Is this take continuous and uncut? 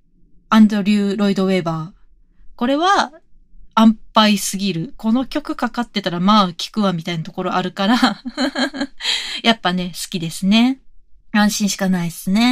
no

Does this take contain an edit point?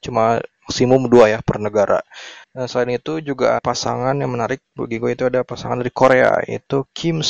yes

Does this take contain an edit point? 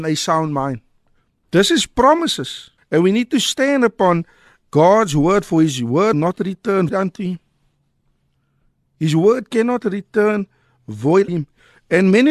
yes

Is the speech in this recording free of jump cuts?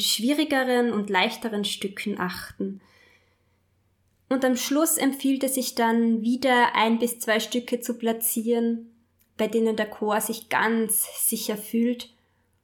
yes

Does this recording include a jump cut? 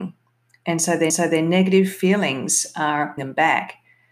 yes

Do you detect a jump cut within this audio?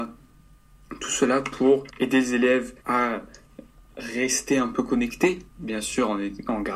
yes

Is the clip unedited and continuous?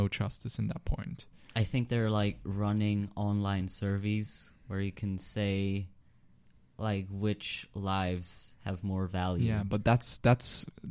yes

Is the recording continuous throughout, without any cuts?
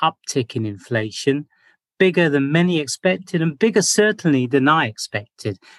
yes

